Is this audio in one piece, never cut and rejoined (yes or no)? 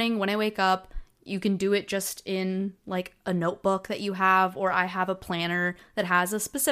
yes